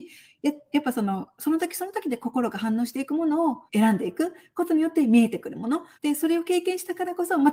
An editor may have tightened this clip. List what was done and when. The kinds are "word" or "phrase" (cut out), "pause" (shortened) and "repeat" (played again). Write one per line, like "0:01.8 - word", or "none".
0:03.7 - pause
0:05.9 - pause